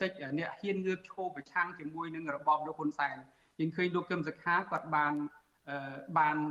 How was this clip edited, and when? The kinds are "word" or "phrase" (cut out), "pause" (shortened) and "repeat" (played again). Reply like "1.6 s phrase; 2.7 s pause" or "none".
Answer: none